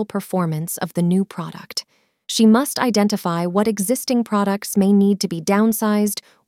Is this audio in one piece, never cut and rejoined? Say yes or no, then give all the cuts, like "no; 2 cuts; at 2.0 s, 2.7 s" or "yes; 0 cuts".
yes; 0 cuts